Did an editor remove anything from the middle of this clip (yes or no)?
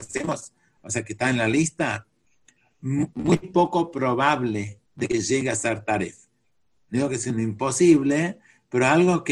yes